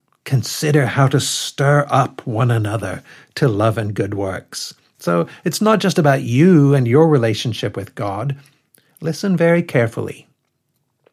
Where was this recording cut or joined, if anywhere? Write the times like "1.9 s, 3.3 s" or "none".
none